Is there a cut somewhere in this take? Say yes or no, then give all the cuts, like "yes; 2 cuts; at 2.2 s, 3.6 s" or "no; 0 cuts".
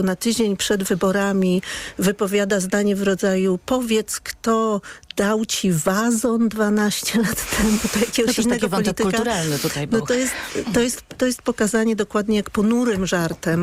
no; 0 cuts